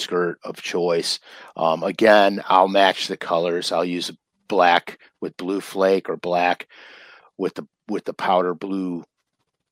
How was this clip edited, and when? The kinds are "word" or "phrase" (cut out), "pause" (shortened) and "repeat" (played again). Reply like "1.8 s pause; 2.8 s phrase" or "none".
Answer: none

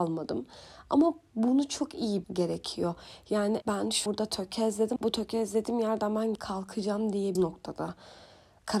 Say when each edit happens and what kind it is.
2.2 s word; 3.6 s word; 4.1 s word; 5.0 s word; 6.4 s word; 7.4 s word

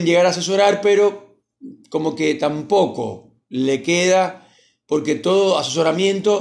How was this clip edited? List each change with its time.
none

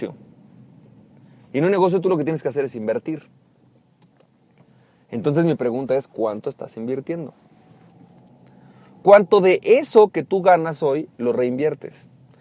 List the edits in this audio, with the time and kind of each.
none

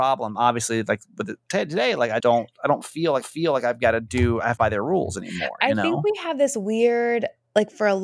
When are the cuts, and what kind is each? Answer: 2.2 s word; 3.2 s repeat; 4.6 s phrase

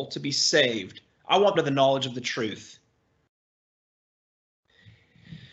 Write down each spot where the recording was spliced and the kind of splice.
1.5 s phrase

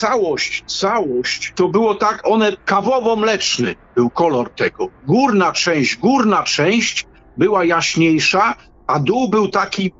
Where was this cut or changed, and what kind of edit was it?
none

